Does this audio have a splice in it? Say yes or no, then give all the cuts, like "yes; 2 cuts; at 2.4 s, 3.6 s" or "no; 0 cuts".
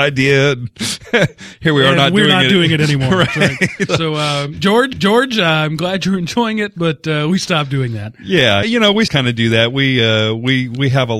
yes; 4 cuts; at 3.9 s, 4.9 s, 8.6 s, 9.1 s